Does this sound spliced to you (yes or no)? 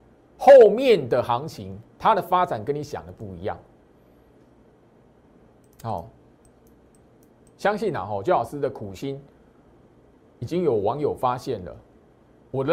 no